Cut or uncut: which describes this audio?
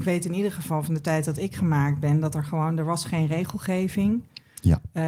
uncut